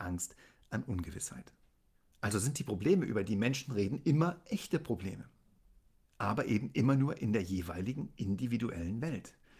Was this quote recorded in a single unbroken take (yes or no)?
yes